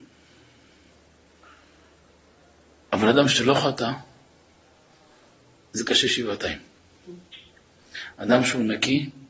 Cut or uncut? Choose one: uncut